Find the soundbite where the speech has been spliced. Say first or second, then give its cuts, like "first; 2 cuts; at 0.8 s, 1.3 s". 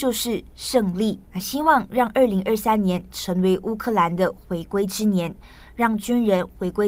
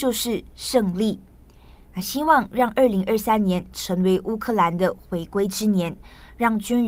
first; 1 cut; at 1.2 s